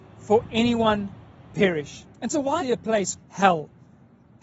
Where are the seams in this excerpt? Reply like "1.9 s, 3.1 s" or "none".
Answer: 1.5 s, 2.1 s, 2.6 s, 3.2 s